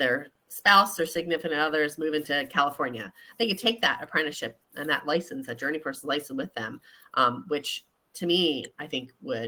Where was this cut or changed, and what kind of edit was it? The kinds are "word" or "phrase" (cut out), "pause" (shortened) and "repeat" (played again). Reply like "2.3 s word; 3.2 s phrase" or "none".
none

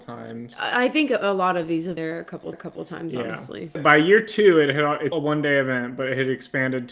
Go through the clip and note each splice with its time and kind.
2.0 s word; 2.5 s repeat; 5.1 s word

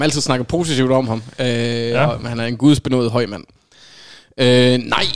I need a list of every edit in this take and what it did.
none

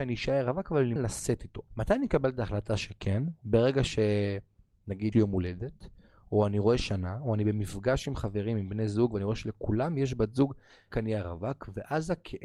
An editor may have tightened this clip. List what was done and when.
1.0 s word; 1.7 s pause; 5.1 s word; 6.8 s word; 10.9 s word

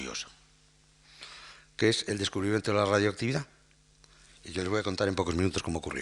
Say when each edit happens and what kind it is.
none

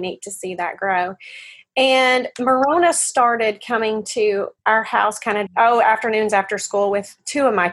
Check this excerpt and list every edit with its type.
4.6 s pause; 5.5 s word

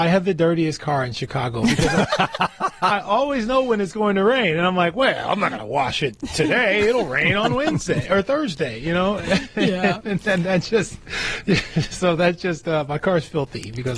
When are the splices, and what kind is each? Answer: none

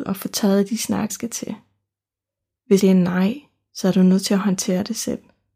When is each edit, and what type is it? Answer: 1.1 s word; 2.8 s word

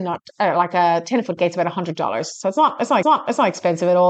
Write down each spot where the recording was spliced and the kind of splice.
3.0 s repeat

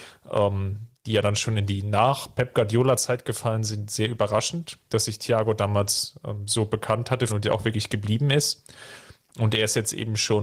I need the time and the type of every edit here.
4.8 s pause; 7.3 s phrase

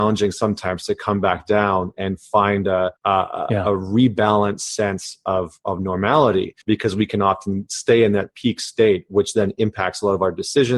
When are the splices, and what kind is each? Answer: 3.0 s pause; 6.6 s pause

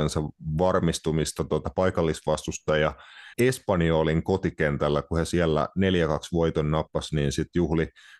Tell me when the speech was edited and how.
3.3 s pause

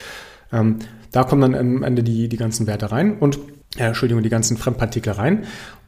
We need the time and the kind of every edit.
3.6 s pause

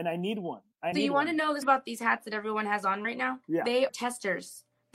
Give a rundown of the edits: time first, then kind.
0.9 s phrase; 1.6 s word; 3.4 s pause; 3.9 s word

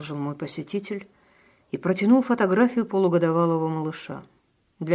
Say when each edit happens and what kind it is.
none

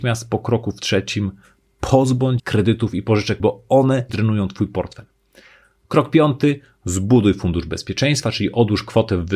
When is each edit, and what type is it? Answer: 2.4 s word; 3.4 s word; 4.1 s word

